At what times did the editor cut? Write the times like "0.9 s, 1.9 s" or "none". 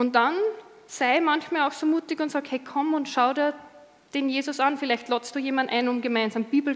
none